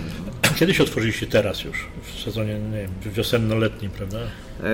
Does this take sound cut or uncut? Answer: uncut